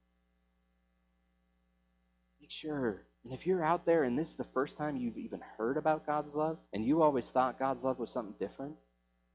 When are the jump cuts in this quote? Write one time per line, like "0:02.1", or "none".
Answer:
0:03.1
0:06.7